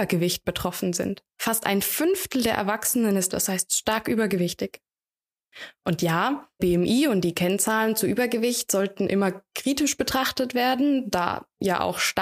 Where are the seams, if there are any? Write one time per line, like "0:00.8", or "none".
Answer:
0:03.3
0:06.6